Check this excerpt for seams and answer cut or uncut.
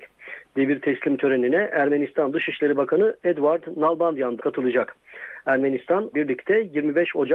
cut